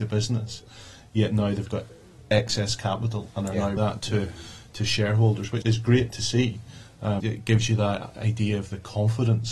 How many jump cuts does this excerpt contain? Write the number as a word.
three